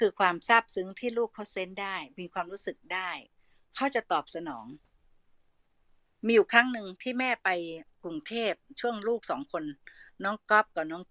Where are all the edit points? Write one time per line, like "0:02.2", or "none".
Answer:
none